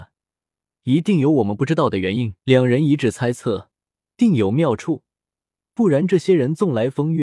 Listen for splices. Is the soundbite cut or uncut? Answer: cut